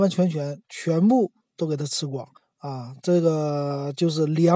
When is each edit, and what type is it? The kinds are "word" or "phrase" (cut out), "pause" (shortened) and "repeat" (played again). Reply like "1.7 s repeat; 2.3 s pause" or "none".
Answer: 2.4 s pause

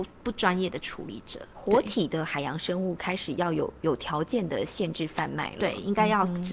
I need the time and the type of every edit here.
1.5 s word

